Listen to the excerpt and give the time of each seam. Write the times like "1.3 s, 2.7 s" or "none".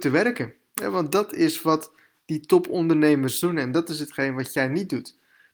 none

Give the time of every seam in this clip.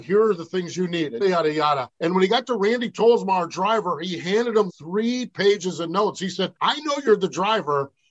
1.2 s, 1.9 s, 4.7 s, 6.6 s

